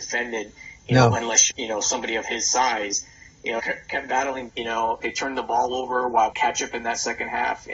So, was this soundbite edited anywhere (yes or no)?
yes